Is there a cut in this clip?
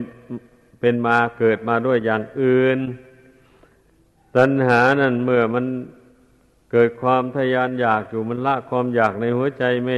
no; 0 cuts

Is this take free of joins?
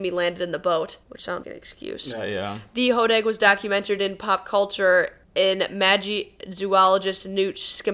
no; 3 cuts; at 1.0 s, 1.4 s, 5.2 s

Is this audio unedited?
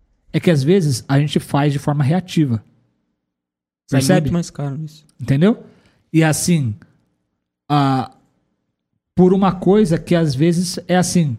yes; 0 cuts

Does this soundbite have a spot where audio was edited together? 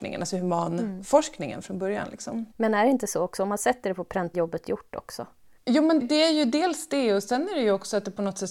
yes; 4 cuts; at 2.5 s, 4.3 s, 5.6 s, 6.0 s

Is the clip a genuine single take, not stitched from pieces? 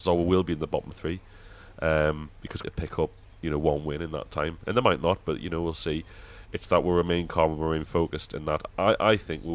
no; 1 cut; at 2.6 s

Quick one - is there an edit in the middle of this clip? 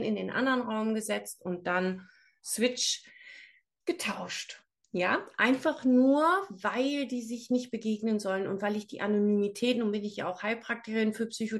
no; 0 cuts

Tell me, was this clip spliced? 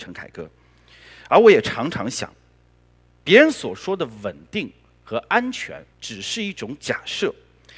yes; 1 cut; at 5.9 s

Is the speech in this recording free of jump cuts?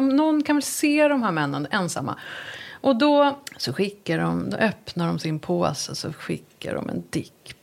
no; 1 cut; at 3.5 s

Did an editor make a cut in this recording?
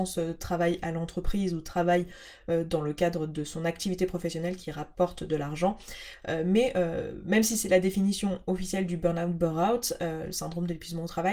no; 0 cuts

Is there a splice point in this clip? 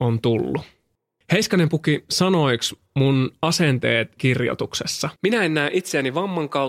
yes; 2 cuts; at 4.2 s, 5.2 s

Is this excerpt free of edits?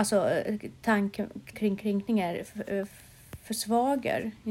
no; 1 cut; at 1.5 s

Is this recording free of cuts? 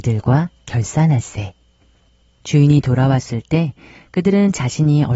yes; 0 cuts

